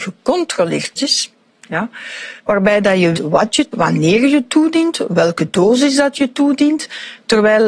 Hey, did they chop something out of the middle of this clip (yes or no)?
yes